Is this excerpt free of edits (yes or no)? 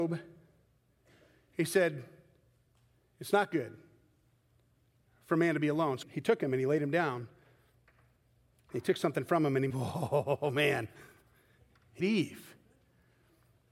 no